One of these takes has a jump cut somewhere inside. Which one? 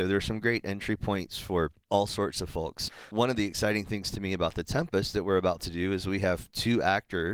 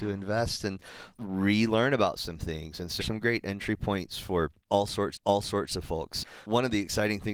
second; 2 cuts; at 3.0 s, 5.1 s

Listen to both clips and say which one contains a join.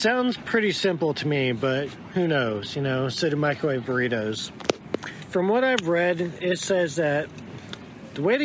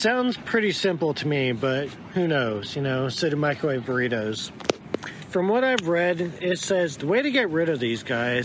second; 1 cut; at 6.9 s

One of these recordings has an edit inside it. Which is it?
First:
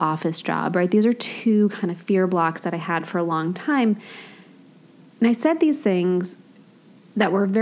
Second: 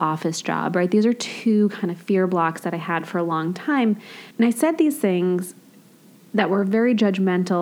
second; 1 cut; at 4.3 s

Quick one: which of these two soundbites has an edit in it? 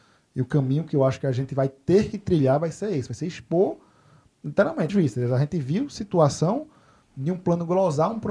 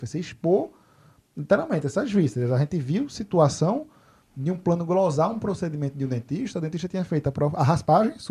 first; 1 cut; at 4.9 s

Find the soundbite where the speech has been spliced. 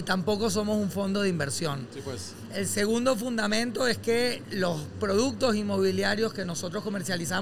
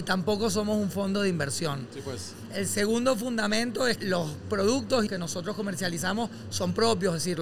second; 2 cuts; at 4.0 s, 5.1 s

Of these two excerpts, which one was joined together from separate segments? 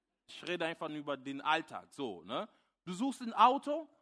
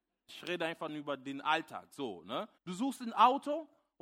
second; 1 cut; at 2.6 s

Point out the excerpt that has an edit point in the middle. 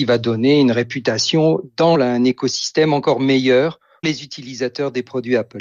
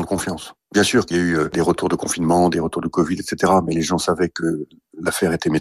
first; 2 cuts; at 1.9 s, 4.0 s

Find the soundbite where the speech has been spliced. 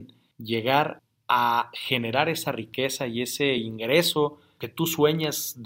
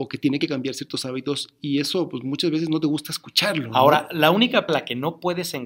second; 1 cut; at 4.7 s

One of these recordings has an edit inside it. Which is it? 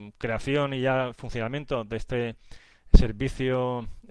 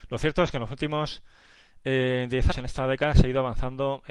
second; 1 cut; at 2.5 s

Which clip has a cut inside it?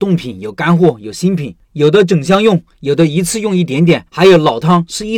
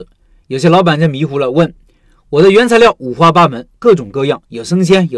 first; 2 cuts; at 1.6 s, 4.1 s

